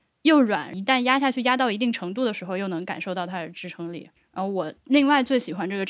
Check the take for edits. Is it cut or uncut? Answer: cut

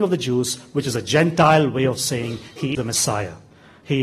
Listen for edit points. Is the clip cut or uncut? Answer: cut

